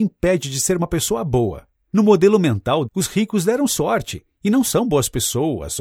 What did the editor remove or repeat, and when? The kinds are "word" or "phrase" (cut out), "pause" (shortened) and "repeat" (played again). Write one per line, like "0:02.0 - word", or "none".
0:02.8 - word